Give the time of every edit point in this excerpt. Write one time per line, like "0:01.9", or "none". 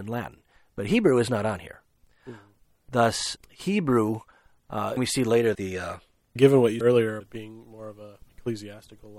0:03.4
0:05.0
0:05.5
0:06.4
0:06.8
0:07.2